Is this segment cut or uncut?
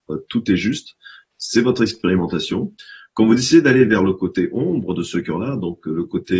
uncut